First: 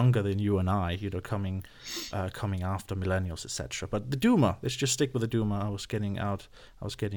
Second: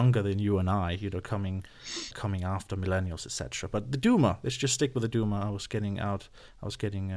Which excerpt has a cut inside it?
second; 1 cut; at 2.1 s

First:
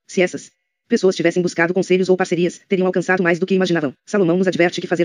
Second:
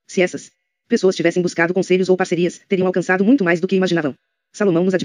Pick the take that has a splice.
first; 2 cuts; at 3.2 s, 4.0 s

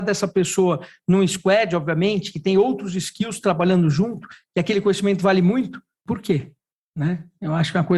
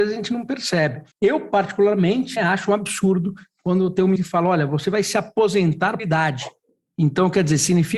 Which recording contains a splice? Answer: second; 4 cuts; at 1.1 s, 2.4 s, 4.2 s, 6.0 s

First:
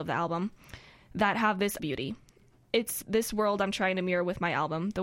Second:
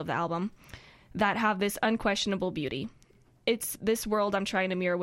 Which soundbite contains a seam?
first; 1 cut; at 1.8 s

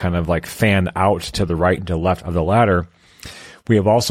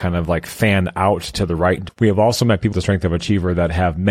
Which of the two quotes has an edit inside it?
second; 2 cuts; at 1.9 s, 2.7 s

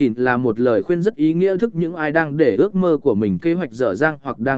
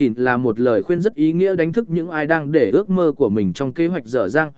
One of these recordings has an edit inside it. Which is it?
first; 2 cuts; at 1.6 s, 3.4 s

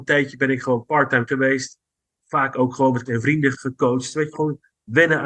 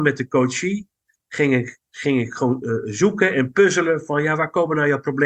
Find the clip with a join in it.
first; 4 cuts; at 1.3 s, 3.1 s, 3.5 s, 4.3 s

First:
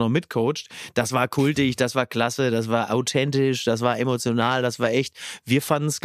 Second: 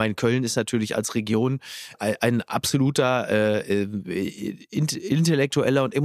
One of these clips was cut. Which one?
second; 1 cut; at 1.9 s

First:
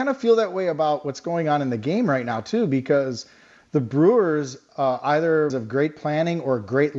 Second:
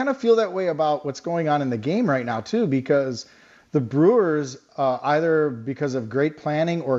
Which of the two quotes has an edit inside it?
first; 1 cut; at 5.5 s

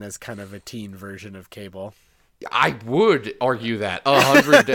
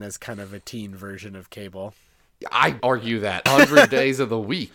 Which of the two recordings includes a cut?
second; 2 cuts; at 2.8 s, 3.5 s

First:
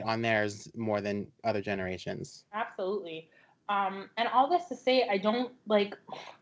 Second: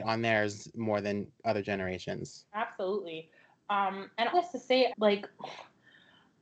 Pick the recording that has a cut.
second; 2 cuts; at 4.3 s, 4.9 s

